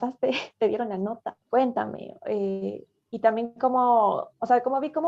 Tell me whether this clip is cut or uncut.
cut